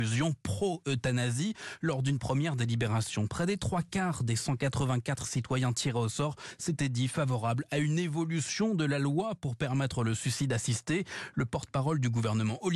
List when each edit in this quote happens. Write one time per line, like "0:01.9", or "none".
none